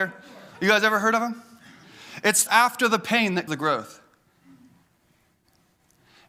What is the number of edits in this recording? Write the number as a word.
two